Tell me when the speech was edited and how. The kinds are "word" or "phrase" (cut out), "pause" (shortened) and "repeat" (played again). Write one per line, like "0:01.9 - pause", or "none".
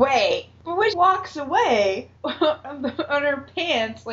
0:00.9 - word
0:02.2 - word